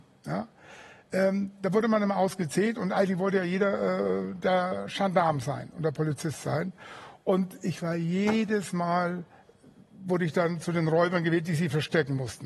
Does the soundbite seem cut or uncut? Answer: uncut